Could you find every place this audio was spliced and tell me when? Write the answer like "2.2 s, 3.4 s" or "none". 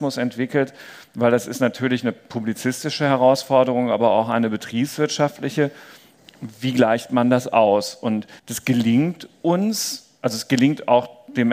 8.4 s